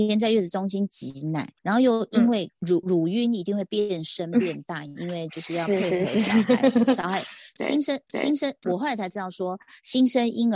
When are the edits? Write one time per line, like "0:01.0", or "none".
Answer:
0:01.6
0:02.8
0:08.1